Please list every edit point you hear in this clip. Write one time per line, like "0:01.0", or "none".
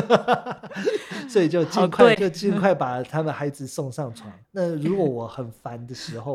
0:02.1
0:04.4